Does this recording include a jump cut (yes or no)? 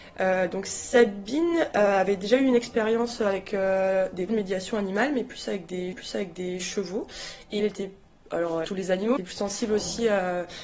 yes